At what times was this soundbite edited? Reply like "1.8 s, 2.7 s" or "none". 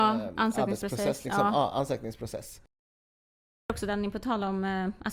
none